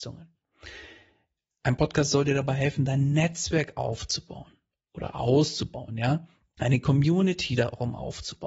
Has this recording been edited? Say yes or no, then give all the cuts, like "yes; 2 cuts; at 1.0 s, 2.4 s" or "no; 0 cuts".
no; 0 cuts